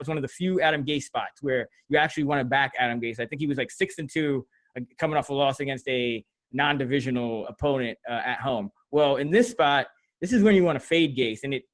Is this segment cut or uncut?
cut